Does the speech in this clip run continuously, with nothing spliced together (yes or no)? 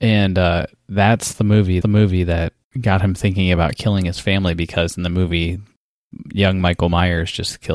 no